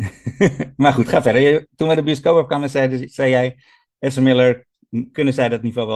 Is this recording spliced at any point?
no; 0 cuts

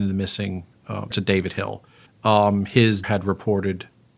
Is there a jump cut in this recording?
yes; 3 cuts; at 1.1 s, 2.1 s, 3.0 s

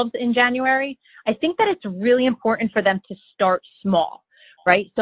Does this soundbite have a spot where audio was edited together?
no; 0 cuts

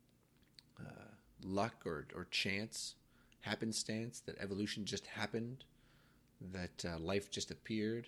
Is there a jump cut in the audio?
no; 0 cuts

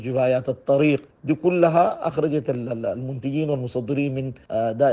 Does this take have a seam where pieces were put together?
no; 0 cuts

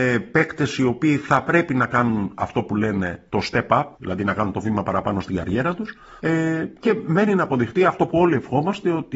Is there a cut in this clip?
yes; 3 cuts; at 3.3 s, 3.9 s, 6.2 s

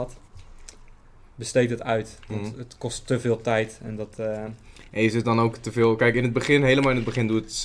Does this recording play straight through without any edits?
yes; 0 cuts

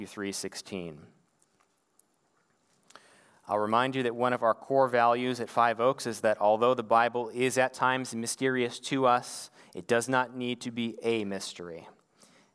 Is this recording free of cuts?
yes; 0 cuts

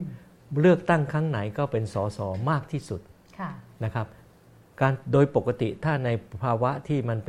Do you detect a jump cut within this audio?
no; 0 cuts

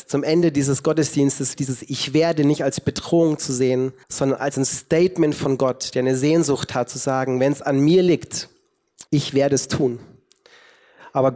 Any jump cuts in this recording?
yes; 3 cuts; at 1.6 s, 4.0 s, 9.1 s

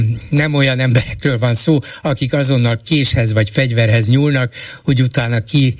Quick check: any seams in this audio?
no; 0 cuts

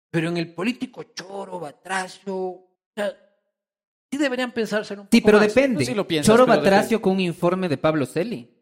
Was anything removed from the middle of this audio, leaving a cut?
yes; 1 cut; at 2.7 s

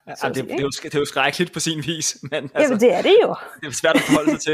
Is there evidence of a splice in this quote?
no; 0 cuts

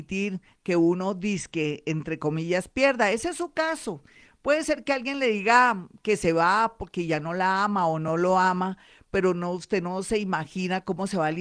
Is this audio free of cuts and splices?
yes; 0 cuts

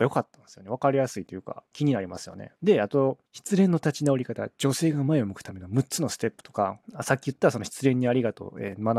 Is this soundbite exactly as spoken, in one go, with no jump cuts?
no; 4 cuts; at 1.7 s, 2.6 s, 3.3 s, 6.8 s

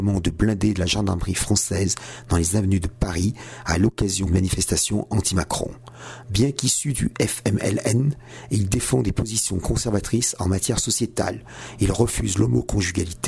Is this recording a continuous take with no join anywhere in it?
no; 1 cut; at 4.3 s

